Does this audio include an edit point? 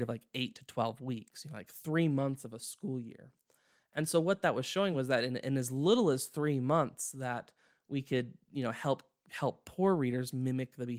no; 0 cuts

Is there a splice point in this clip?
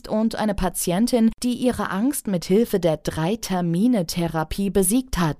no; 0 cuts

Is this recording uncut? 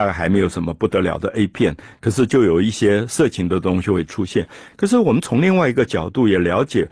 yes; 0 cuts

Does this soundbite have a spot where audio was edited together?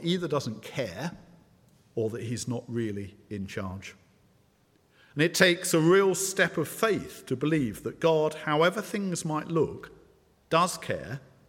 no; 0 cuts

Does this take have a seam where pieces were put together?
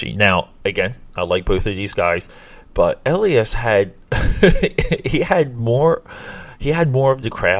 no; 0 cuts

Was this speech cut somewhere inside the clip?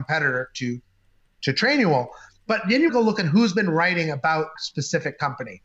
yes; 2 cuts; at 2.9 s, 4.6 s

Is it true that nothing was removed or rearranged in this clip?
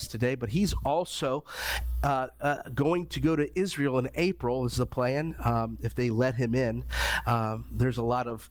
yes; 0 cuts

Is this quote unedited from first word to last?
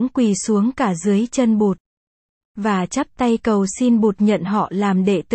yes; 0 cuts

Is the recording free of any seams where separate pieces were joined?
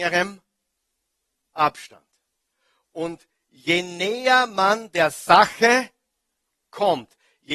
yes; 0 cuts

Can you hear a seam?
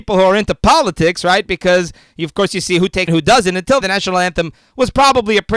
yes; 2 cuts; at 3.1 s, 3.8 s

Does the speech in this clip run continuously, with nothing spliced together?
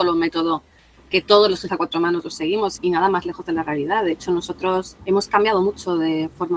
no; 3 cuts; at 1.7 s, 2.8 s, 5.0 s

